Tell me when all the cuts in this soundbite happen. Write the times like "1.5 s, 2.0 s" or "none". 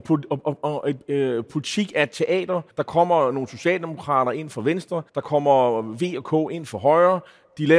2.7 s, 5.1 s